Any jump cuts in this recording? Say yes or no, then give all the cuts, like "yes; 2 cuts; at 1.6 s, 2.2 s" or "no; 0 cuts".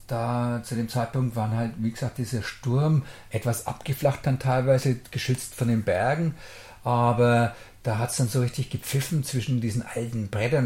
no; 0 cuts